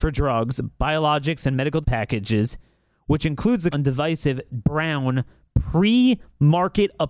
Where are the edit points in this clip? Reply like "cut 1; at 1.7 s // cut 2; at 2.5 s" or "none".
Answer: cut 1; at 1.8 s // cut 2; at 3.7 s // cut 3; at 4.6 s